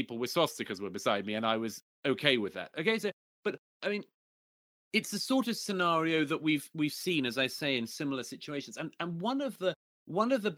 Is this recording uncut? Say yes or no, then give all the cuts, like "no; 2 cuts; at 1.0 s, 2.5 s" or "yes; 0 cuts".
no; 1 cut; at 3.7 s